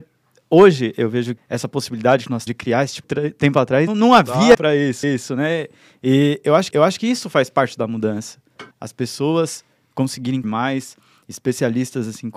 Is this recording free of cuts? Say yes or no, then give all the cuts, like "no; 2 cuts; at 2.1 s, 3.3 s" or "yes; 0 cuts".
no; 9 cuts; at 1.4 s, 2.5 s, 3.0 s, 3.9 s, 4.5 s, 5.0 s, 6.7 s, 8.7 s, 10.4 s